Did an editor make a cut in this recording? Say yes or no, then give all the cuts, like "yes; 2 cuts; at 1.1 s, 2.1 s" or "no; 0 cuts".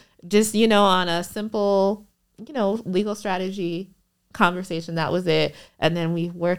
no; 0 cuts